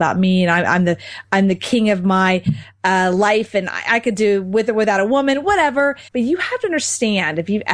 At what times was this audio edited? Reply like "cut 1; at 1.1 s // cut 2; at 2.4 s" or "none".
cut 1; at 6.1 s